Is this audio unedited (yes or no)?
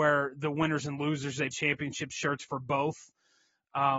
no